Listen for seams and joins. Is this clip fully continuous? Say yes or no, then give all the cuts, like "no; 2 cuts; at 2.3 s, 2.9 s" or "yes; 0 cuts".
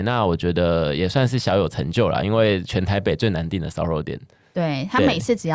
yes; 0 cuts